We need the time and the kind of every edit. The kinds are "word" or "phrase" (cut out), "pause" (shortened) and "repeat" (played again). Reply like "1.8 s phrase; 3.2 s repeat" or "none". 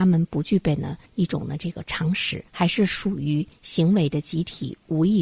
1.1 s pause; 2.5 s pause